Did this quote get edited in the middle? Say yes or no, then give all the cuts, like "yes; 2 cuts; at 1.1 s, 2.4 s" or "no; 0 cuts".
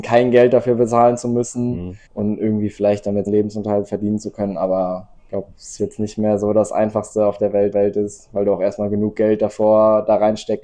yes; 5 cuts; at 2.1 s, 3.3 s, 5.2 s, 5.8 s, 7.7 s